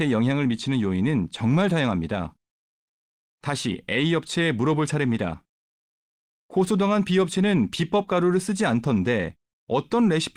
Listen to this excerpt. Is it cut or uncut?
uncut